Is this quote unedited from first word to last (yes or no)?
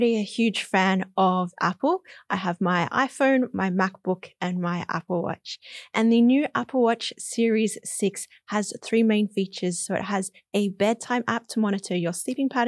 yes